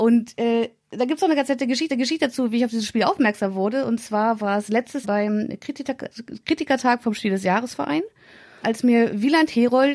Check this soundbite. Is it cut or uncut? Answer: cut